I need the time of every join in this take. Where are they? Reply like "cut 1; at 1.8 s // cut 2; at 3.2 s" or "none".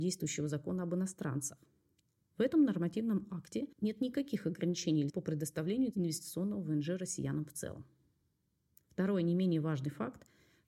cut 1; at 5.1 s